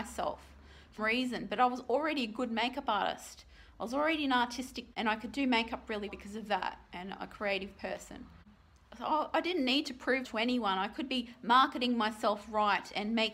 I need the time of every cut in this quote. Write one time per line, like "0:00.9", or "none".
0:01.0
0:04.9
0:06.1
0:10.2